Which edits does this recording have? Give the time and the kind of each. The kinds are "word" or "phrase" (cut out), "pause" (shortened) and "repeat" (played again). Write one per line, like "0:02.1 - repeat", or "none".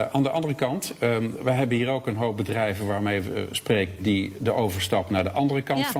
none